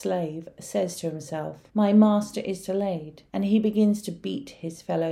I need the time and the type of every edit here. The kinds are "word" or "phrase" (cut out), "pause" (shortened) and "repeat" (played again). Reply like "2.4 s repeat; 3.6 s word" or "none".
1.7 s pause; 3.3 s pause